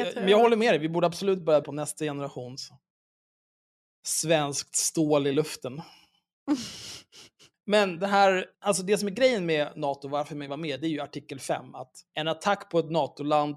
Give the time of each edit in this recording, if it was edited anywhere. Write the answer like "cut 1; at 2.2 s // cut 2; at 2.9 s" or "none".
cut 1; at 1.6 s // cut 2; at 8.5 s // cut 3; at 10.5 s // cut 4; at 12.1 s